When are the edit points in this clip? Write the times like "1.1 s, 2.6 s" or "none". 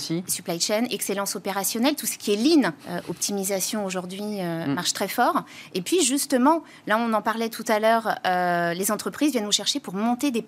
2.8 s